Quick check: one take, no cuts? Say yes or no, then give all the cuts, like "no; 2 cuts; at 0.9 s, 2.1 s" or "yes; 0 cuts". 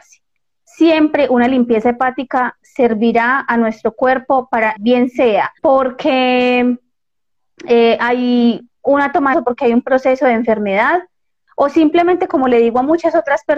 no; 3 cuts; at 4.7 s, 5.6 s, 9.3 s